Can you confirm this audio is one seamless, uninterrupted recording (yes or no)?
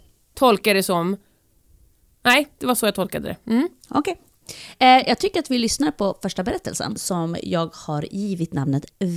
yes